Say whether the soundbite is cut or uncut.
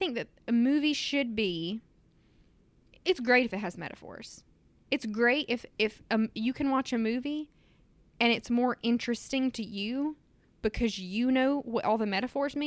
uncut